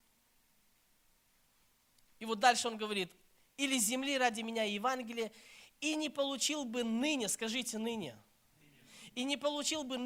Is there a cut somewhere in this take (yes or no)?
no